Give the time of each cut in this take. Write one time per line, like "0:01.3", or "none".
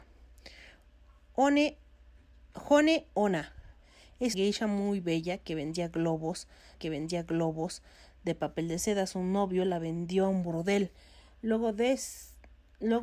0:04.3
0:06.7